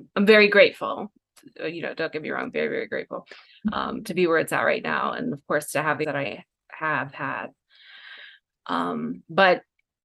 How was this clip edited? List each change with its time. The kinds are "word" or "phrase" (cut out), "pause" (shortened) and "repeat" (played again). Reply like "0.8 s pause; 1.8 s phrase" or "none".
6.0 s word